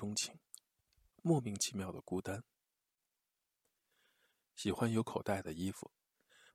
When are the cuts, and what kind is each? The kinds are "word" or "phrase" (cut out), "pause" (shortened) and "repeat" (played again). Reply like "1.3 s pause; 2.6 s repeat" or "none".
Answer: 1.1 s phrase